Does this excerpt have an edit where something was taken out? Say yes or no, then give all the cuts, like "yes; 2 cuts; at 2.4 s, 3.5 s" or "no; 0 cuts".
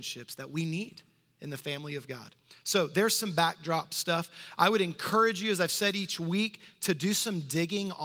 no; 0 cuts